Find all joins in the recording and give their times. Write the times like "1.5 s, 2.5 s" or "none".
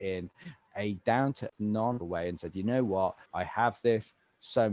1.5 s, 2.0 s, 3.3 s